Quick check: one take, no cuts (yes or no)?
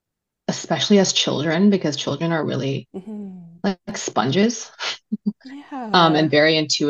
yes